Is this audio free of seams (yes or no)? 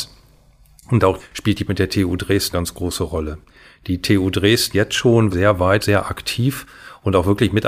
no